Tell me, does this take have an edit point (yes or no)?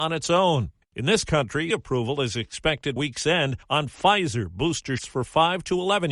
yes